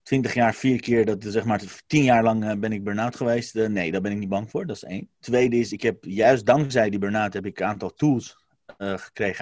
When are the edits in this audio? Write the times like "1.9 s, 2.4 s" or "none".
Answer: 5.1 s